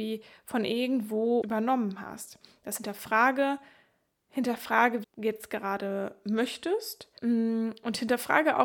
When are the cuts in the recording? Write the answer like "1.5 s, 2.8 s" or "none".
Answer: 1.4 s, 2.8 s, 5.0 s, 7.2 s